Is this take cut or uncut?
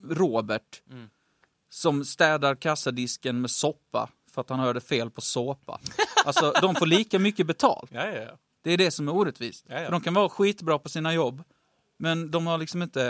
uncut